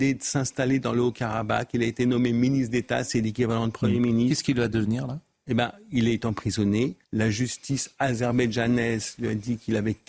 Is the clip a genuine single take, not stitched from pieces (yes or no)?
no